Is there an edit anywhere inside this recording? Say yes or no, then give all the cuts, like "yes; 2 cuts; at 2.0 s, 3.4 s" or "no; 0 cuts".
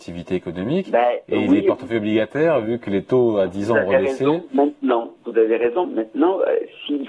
yes; 2 cuts; at 5.2 s, 5.8 s